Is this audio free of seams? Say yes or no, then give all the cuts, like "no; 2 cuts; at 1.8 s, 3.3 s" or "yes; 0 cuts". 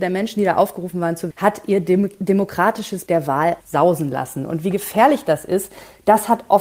no; 3 cuts; at 1.3 s, 3.1 s, 3.6 s